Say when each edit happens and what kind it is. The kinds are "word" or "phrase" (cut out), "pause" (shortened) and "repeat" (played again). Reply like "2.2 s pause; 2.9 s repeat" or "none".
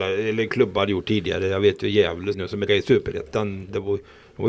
2.3 s word; 2.7 s word